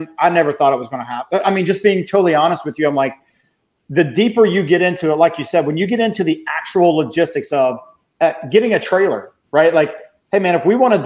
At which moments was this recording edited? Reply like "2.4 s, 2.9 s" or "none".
none